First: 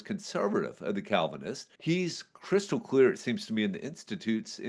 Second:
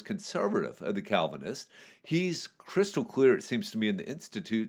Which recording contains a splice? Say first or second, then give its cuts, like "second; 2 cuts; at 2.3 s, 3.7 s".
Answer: first; 1 cut; at 1.7 s